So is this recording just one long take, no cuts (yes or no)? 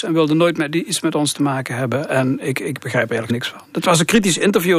no